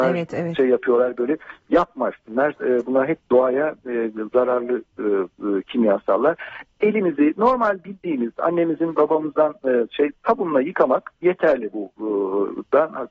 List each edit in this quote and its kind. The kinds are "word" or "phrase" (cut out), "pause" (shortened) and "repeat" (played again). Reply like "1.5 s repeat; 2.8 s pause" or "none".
11.2 s pause